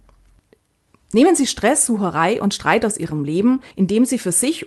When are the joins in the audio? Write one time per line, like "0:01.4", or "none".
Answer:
0:03.7